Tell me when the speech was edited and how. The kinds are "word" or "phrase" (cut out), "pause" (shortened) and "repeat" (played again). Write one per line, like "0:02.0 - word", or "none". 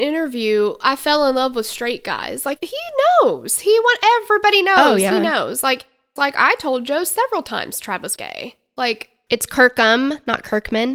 0:02.6 - word
0:06.2 - phrase
0:08.2 - word